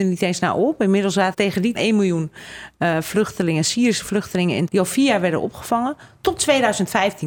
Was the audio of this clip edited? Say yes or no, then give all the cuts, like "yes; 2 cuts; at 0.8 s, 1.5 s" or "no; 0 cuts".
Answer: yes; 3 cuts; at 1.3 s, 1.7 s, 4.7 s